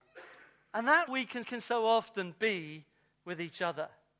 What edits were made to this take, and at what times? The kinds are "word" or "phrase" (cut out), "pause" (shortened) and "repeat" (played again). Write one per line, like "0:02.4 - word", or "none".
0:01.1 - word
0:01.4 - repeat